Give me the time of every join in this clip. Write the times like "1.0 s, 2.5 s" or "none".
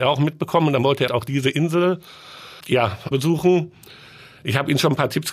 1.1 s, 2.6 s, 3.1 s